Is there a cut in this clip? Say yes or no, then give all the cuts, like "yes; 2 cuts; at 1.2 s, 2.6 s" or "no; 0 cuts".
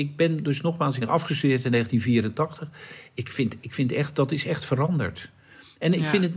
yes; 2 cuts; at 1.0 s, 3.6 s